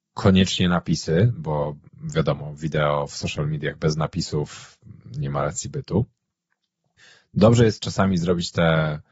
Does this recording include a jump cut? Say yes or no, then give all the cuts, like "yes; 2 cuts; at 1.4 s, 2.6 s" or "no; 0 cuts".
no; 0 cuts